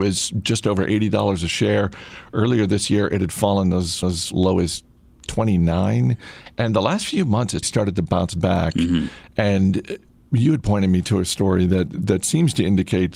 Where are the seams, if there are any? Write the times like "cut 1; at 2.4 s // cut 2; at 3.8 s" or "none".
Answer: cut 1; at 4.0 s // cut 2; at 7.6 s // cut 3; at 10.1 s